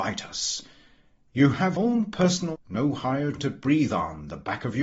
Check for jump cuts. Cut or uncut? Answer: cut